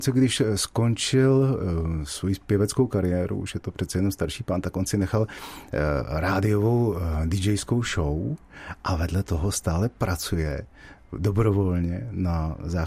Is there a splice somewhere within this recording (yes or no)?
no